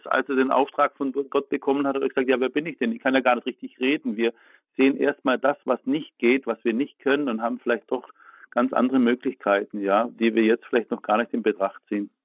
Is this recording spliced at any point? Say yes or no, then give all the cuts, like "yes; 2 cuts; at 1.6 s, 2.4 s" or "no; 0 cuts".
no; 0 cuts